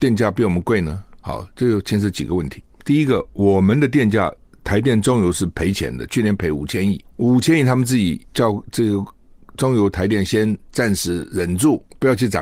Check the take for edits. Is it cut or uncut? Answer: cut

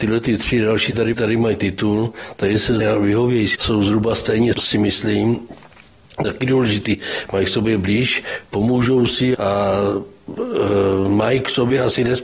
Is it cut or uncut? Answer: cut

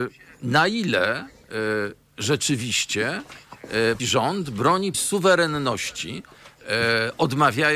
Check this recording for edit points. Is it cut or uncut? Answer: cut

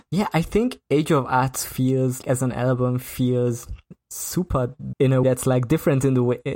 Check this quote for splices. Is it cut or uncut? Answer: cut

